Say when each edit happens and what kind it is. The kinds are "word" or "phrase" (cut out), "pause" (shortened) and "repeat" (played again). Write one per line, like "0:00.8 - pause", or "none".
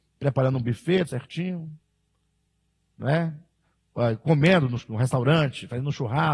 0:01.1 - word